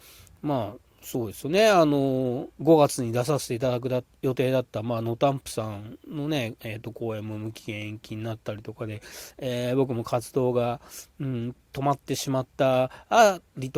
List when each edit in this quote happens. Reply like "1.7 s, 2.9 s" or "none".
2.5 s